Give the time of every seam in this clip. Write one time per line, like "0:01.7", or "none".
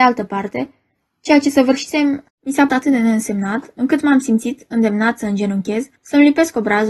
0:02.3
0:02.7
0:06.0